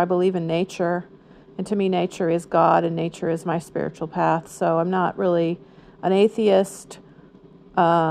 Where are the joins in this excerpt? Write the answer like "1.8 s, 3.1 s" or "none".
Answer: none